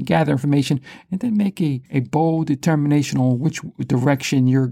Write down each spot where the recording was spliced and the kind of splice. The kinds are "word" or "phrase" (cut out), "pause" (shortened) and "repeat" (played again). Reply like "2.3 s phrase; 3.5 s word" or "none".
1.9 s pause